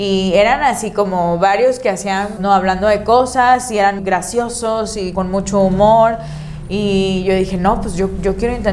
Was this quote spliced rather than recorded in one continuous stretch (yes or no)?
yes